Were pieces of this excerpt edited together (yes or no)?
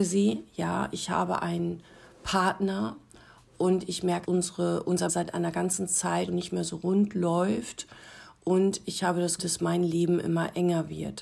yes